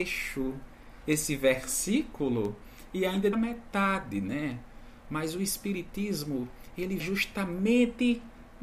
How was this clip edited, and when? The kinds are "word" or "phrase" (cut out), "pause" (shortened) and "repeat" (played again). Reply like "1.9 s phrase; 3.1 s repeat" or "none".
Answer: 3.3 s word; 7.0 s word